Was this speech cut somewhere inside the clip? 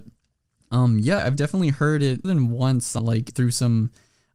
yes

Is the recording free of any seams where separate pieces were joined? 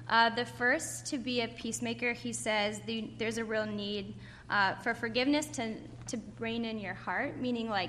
yes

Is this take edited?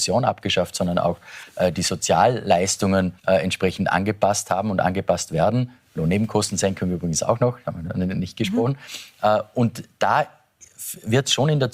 yes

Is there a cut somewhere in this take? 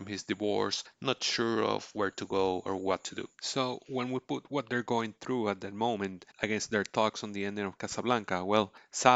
yes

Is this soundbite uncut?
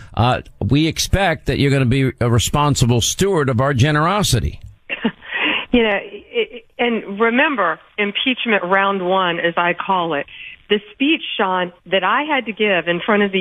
yes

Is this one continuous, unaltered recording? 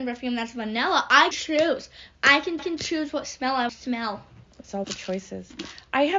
no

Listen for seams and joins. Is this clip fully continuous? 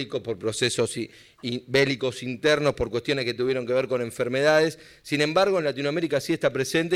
yes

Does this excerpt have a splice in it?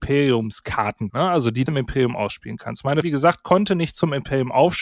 yes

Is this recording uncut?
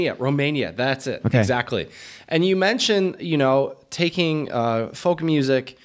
yes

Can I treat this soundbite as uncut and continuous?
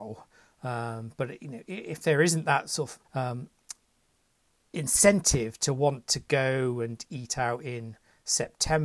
no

